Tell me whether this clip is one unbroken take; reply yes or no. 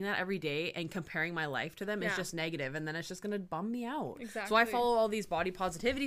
yes